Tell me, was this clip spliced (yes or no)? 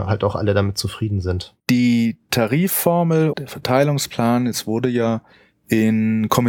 yes